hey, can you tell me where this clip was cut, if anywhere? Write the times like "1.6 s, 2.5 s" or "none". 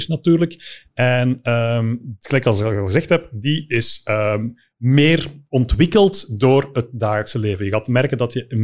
none